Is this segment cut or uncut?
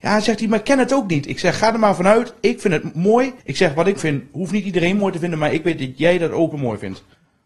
cut